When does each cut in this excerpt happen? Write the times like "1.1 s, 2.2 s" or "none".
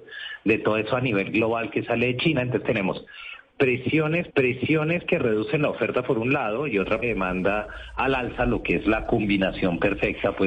4.3 s, 7.0 s